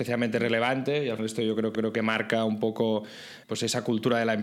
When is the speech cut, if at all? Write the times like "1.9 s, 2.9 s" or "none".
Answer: 1.2 s, 1.7 s, 3.4 s